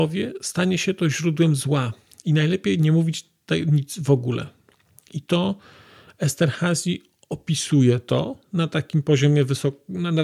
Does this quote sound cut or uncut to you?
uncut